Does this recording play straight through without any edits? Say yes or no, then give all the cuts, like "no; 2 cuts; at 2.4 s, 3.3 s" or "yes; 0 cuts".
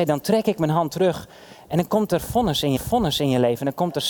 no; 1 cut; at 2.8 s